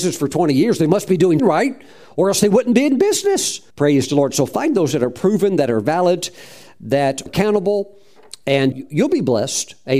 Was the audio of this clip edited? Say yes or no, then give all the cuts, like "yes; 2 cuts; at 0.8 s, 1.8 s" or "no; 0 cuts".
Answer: yes; 4 cuts; at 1.4 s, 3.7 s, 7.3 s, 8.7 s